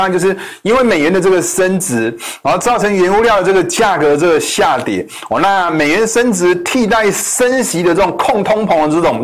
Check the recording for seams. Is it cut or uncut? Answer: uncut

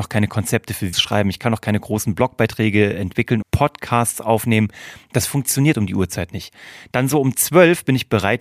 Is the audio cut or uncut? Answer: cut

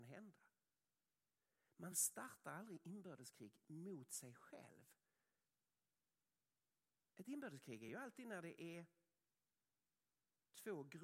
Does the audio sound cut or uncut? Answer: uncut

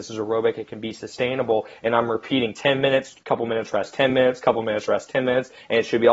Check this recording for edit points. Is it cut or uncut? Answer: uncut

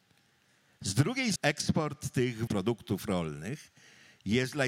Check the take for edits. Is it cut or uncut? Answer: cut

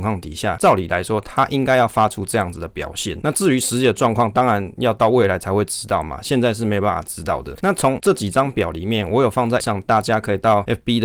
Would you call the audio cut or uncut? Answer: cut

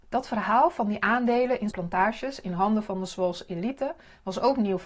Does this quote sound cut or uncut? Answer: cut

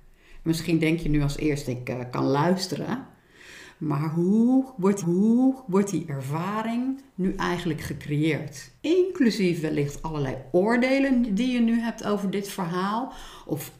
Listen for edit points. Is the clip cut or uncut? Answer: cut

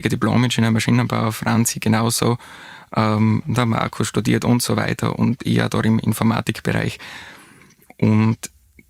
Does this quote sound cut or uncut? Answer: uncut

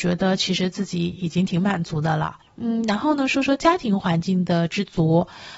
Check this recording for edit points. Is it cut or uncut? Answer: cut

